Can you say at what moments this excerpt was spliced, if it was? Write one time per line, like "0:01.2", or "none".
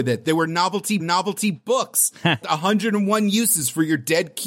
0:01.0
0:02.4